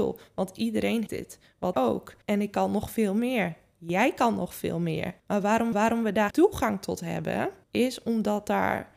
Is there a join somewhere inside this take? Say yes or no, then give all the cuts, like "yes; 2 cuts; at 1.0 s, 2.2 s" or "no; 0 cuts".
yes; 7 cuts; at 1.1 s, 1.7 s, 2.2 s, 5.2 s, 5.7 s, 6.3 s, 7.6 s